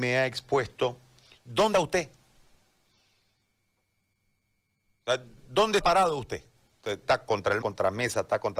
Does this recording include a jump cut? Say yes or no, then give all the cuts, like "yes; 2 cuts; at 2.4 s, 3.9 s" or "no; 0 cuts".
yes; 4 cuts; at 1.7 s, 5.8 s, 7.0 s, 7.6 s